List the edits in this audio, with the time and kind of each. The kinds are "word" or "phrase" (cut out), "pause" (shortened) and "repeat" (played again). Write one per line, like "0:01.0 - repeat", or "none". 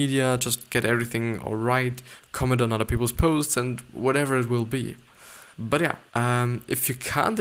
0:05.5 - pause
0:06.1 - pause